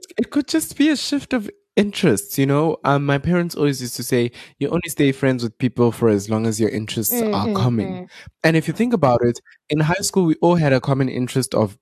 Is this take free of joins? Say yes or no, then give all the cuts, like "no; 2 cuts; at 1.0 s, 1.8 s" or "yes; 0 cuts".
yes; 0 cuts